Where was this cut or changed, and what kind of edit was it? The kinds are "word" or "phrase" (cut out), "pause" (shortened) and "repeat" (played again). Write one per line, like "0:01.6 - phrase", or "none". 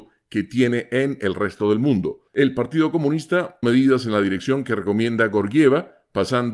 0:02.3 - pause
0:03.6 - phrase